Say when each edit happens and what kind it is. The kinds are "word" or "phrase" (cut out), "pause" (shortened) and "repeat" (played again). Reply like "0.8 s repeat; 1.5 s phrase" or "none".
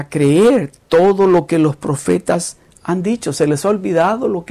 none